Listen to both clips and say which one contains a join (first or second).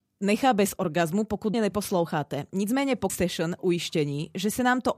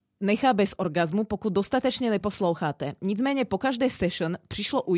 first